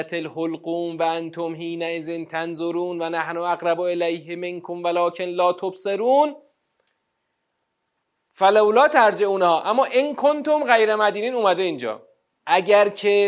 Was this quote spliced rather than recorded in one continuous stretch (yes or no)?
no